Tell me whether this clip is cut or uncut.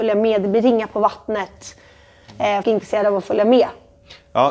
cut